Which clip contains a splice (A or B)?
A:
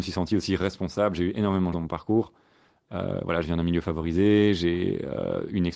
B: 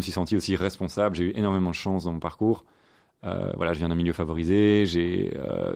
A